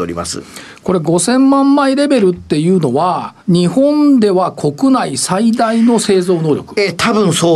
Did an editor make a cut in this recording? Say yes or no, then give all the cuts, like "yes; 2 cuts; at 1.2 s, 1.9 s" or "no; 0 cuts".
yes; 1 cut; at 3.4 s